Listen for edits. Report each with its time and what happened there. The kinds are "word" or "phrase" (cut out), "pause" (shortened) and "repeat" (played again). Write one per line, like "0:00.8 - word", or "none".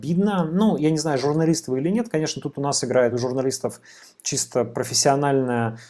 none